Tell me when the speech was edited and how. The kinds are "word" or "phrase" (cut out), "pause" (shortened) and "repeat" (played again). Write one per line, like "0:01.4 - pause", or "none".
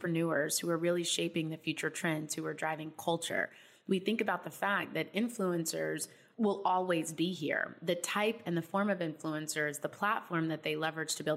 none